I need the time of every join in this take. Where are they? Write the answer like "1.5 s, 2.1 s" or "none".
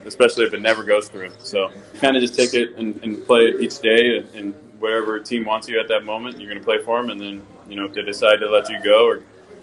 1.9 s